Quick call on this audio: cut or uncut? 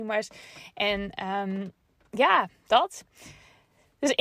uncut